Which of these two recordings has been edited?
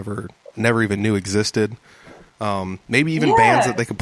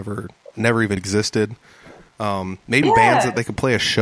second; 2 cuts; at 1.0 s, 2.8 s

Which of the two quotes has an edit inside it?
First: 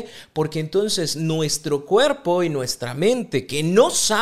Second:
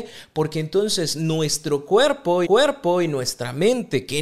second; 1 cut; at 2.4 s

